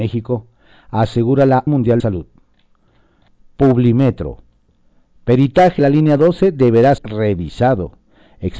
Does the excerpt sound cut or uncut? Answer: cut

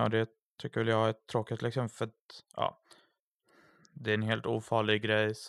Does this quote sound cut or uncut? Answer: uncut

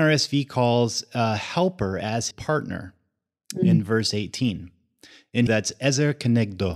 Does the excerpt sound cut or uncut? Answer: cut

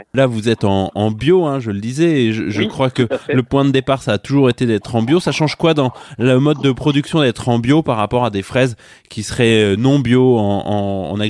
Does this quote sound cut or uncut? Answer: uncut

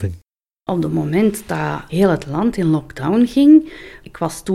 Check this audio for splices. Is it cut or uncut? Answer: uncut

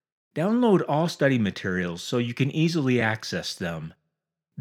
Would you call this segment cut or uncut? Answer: uncut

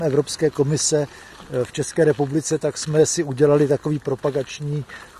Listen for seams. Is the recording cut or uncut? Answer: uncut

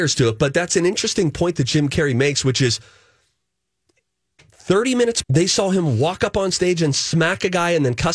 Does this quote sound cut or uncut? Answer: cut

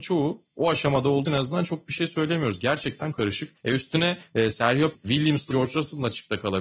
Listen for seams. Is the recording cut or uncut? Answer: cut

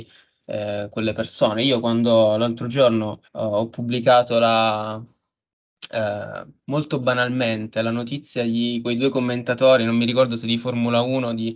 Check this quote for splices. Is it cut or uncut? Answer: cut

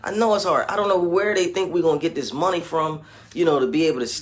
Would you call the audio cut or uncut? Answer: uncut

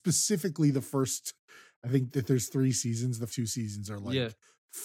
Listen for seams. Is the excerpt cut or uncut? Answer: cut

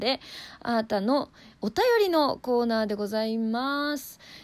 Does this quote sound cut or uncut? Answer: uncut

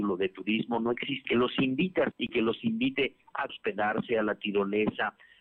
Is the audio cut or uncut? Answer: cut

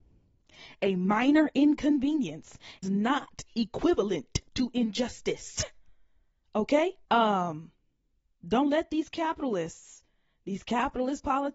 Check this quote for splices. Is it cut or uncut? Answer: cut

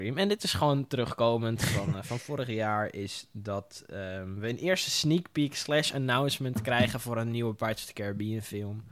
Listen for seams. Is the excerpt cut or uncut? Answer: uncut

